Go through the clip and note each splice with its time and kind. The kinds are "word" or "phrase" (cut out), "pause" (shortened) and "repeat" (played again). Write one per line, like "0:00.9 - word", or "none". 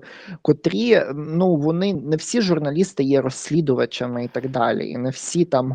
0:01.9 - word